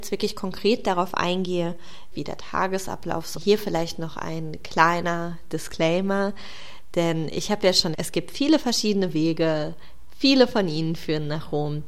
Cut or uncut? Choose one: cut